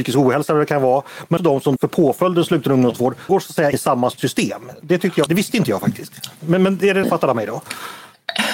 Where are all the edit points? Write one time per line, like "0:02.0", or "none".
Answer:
0:01.4
0:01.8
0:03.3
0:03.7
0:05.3
0:07.0